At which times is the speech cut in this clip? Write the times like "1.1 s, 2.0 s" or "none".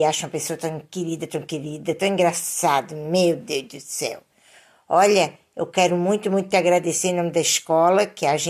none